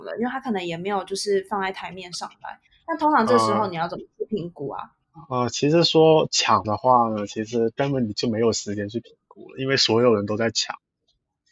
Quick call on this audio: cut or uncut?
cut